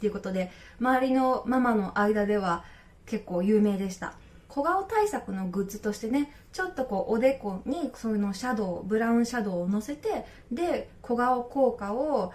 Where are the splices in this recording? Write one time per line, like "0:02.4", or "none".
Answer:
none

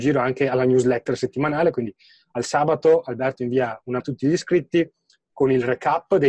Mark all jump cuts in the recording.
0:04.0

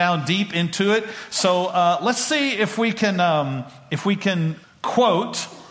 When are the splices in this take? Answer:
0:04.6

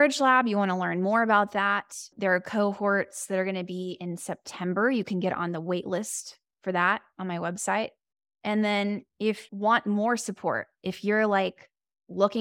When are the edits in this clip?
0:09.5

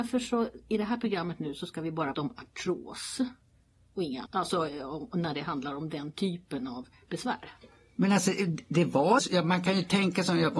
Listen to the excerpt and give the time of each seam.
0:02.1
0:04.3
0:09.2

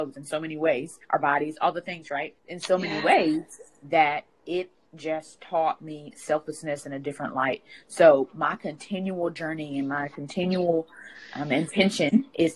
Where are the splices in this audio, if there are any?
0:01.0
0:02.4
0:04.3

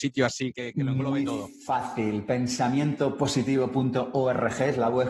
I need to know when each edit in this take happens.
none

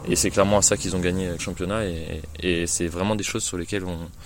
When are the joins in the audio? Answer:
0:01.4
0:02.7

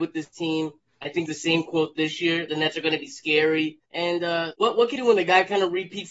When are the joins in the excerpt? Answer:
0:01.3
0:02.5
0:03.9
0:04.5
0:05.0

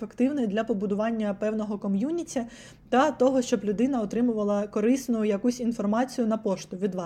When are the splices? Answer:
none

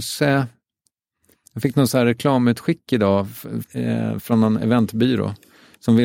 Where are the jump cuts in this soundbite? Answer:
0:03.6

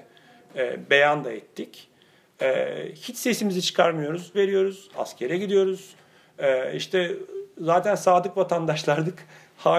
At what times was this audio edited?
0:04.3

